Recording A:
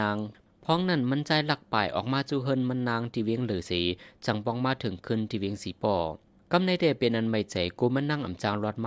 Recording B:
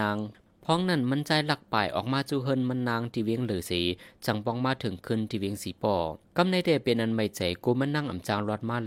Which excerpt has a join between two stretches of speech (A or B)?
B